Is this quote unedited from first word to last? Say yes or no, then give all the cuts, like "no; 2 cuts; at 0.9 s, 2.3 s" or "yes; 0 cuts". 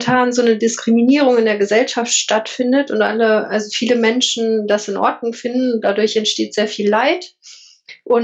yes; 0 cuts